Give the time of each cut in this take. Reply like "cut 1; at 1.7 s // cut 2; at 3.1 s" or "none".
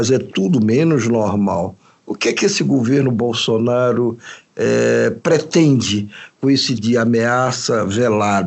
cut 1; at 6.8 s